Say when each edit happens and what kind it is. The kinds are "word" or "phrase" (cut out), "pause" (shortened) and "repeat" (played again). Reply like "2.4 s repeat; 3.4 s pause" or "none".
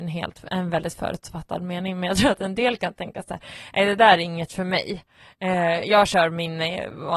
none

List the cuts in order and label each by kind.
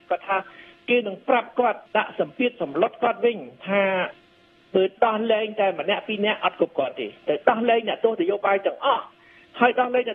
1.9 s pause

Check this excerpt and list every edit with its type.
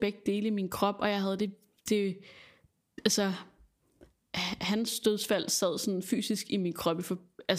none

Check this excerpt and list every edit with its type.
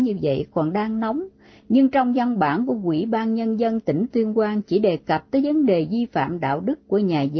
none

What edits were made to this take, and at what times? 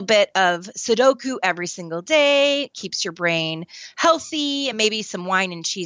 none

